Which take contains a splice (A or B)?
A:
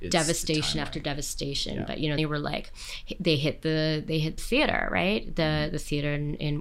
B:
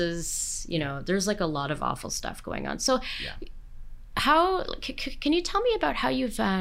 A